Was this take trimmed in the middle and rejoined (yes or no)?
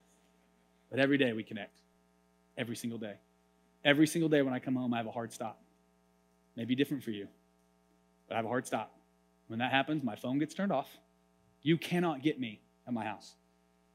no